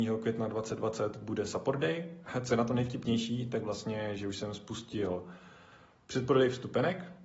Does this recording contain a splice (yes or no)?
no